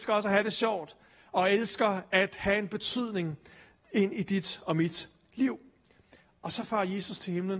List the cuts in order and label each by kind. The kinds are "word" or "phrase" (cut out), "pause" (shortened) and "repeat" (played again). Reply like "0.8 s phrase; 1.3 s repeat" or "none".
none